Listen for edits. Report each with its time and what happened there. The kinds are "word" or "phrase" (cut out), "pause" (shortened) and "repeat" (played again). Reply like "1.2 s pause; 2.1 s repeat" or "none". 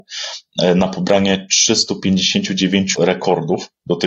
2.9 s word